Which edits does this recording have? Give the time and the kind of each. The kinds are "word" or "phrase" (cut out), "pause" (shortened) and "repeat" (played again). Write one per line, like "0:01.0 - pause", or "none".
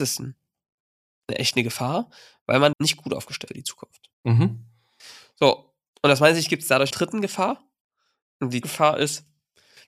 0:02.7 - word
0:03.5 - word
0:04.1 - pause
0:06.9 - phrase
0:08.6 - word